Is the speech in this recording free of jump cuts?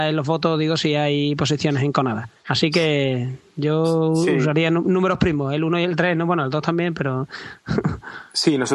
no; 1 cut; at 2.4 s

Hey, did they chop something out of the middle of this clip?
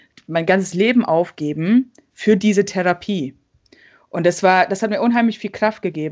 no; 0 cuts

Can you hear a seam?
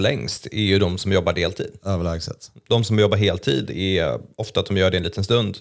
no; 0 cuts

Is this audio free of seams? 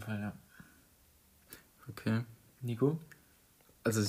yes; 0 cuts

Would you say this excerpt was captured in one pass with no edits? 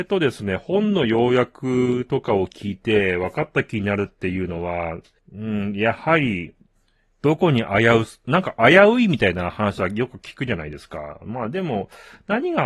no; 2 cuts; at 5.2 s, 6.7 s

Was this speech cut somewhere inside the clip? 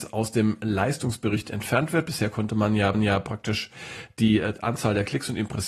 yes; 1 cut; at 2.9 s

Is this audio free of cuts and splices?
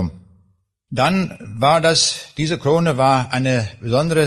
yes; 0 cuts

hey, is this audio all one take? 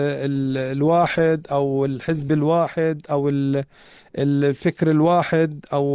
yes; 0 cuts

